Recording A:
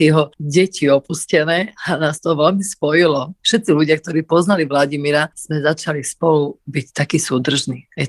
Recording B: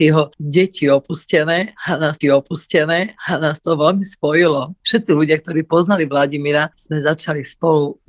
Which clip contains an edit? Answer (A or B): B